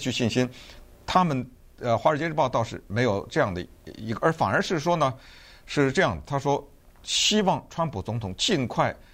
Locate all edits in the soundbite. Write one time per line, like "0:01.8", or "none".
none

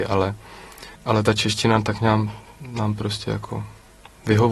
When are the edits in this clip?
0:00.9

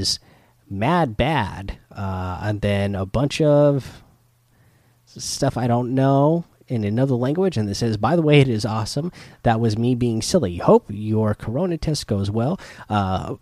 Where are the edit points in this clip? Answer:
none

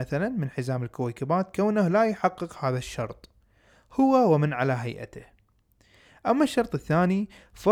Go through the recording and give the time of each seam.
none

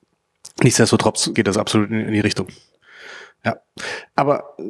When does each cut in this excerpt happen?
0:01.3
0:02.2

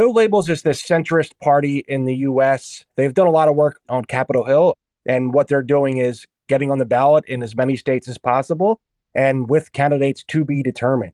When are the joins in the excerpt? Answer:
0:02.9

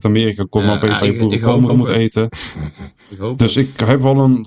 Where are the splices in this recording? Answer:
0:01.0
0:01.7

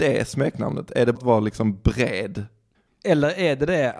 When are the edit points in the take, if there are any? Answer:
0:01.1
0:02.7

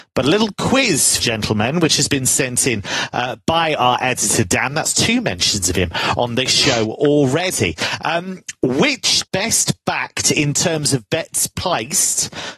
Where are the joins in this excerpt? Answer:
0:01.2
0:09.3

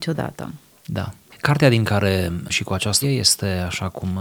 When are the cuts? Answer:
0:02.5
0:03.0

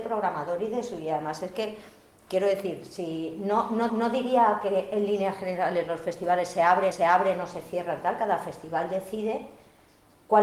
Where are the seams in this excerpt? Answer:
0:03.9
0:06.9

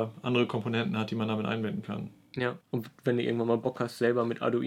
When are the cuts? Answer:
0:02.6

